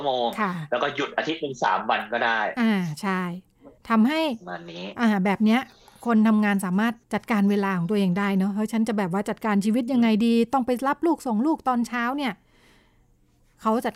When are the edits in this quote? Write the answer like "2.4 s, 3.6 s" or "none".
3.8 s, 7.0 s